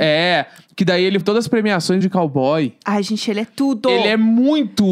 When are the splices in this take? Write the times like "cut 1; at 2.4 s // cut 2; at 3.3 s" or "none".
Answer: cut 1; at 1.2 s // cut 2; at 2.0 s